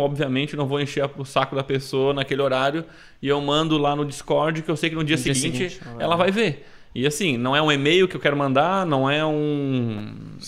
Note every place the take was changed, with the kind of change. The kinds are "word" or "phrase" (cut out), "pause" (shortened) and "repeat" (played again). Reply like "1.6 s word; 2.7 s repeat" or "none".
none